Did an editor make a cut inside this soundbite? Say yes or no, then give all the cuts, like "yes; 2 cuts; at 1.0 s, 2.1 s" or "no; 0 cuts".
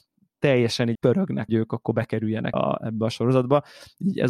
yes; 3 cuts; at 0.9 s, 1.5 s, 2.5 s